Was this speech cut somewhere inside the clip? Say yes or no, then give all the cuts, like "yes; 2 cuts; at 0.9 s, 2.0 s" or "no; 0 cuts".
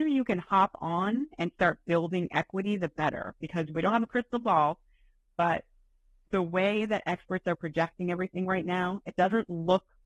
no; 0 cuts